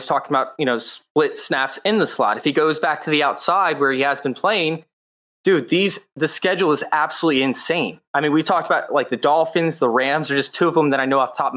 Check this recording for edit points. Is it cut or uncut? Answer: uncut